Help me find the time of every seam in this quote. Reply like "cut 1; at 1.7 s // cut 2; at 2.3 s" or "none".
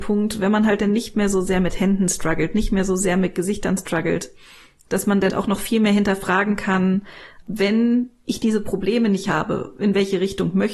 cut 1; at 5.3 s // cut 2; at 7.4 s